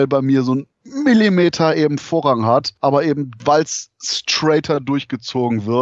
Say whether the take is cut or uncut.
uncut